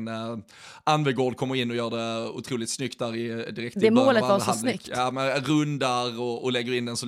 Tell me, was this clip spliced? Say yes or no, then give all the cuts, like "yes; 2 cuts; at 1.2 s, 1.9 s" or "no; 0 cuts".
no; 0 cuts